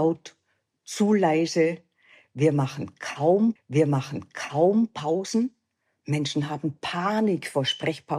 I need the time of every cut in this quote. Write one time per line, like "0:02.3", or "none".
0:03.6

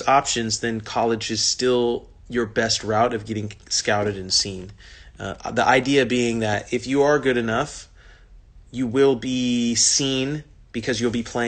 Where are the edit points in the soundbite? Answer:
0:02.2

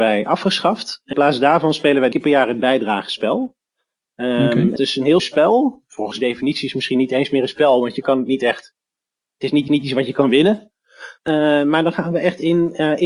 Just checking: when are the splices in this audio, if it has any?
0:01.1
0:02.1
0:04.8
0:05.2
0:06.1
0:09.7
0:11.2

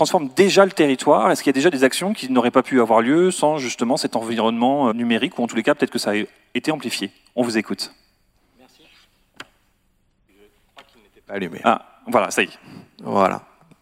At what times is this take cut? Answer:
0:04.9

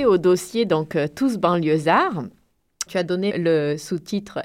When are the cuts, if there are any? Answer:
0:02.9
0:03.3

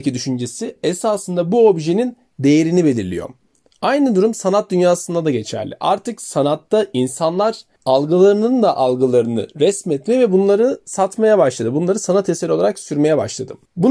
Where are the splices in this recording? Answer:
none

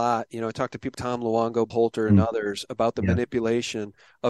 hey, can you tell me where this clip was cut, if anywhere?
0:00.9
0:01.7

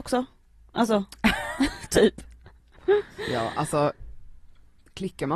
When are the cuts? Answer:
none

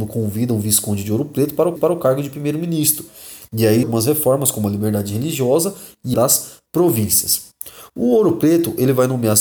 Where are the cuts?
0:01.8
0:03.8
0:06.1
0:06.7

